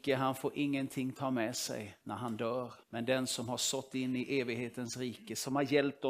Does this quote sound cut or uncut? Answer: cut